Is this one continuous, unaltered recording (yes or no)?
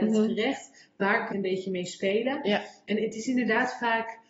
no